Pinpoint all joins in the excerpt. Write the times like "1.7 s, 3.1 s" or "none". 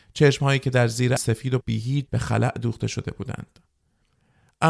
1.2 s, 1.6 s, 2.1 s